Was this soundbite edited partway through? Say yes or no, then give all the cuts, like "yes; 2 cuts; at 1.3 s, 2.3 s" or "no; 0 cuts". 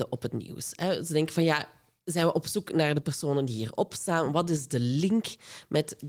no; 0 cuts